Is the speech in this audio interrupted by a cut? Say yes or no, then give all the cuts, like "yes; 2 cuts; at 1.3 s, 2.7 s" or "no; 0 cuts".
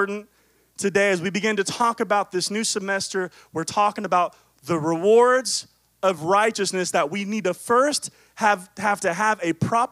no; 0 cuts